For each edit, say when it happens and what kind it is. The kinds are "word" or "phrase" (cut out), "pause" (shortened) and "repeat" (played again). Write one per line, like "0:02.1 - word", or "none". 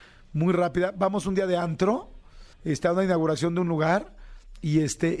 0:02.5 - pause